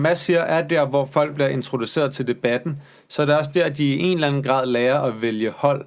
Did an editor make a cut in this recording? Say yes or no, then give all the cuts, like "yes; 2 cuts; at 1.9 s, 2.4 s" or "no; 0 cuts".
no; 0 cuts